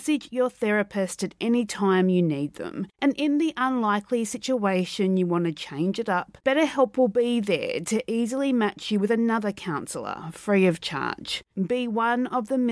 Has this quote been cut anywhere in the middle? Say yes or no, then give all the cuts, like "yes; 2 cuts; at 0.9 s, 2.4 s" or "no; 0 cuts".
yes; 3 cuts; at 2.9 s, 6.4 s, 11.5 s